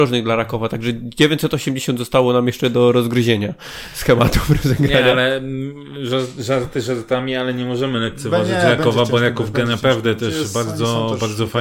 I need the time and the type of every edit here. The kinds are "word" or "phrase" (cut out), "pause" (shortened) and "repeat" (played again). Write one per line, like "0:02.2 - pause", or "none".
none